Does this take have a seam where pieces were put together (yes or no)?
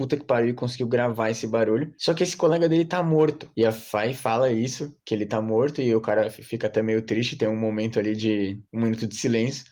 no